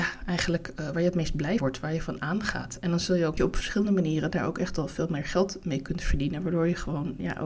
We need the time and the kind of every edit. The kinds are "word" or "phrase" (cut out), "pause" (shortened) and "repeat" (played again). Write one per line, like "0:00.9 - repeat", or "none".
0:01.6 - word
0:03.4 - phrase